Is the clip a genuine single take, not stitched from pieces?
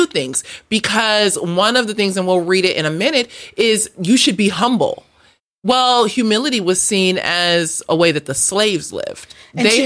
yes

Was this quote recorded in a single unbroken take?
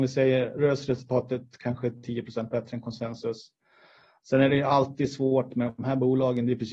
yes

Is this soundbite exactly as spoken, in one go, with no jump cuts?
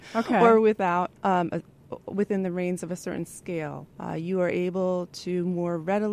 no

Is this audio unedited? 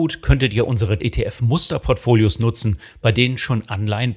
no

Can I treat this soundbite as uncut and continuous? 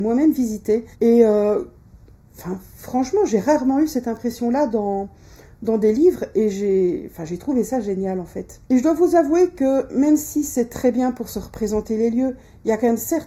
no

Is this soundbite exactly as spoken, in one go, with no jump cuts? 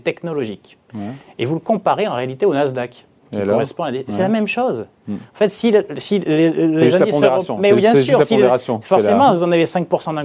yes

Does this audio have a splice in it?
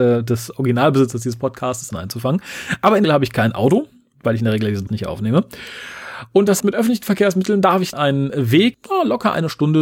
yes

